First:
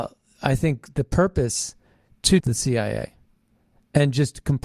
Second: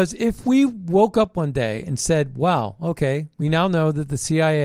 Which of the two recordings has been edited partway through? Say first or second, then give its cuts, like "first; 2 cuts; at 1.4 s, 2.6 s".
first; 1 cut; at 2.4 s